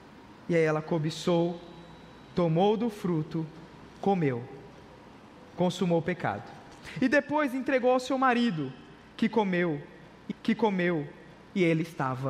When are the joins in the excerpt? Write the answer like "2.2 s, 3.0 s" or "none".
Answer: 10.3 s